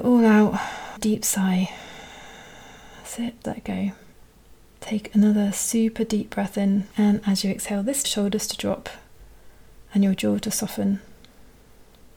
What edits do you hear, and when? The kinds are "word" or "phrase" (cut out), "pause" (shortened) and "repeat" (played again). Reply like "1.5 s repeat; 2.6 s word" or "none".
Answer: 1.0 s phrase; 3.4 s word; 4.1 s pause; 6.9 s pause; 8.0 s phrase